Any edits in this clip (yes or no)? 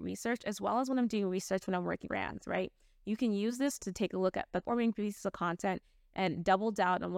yes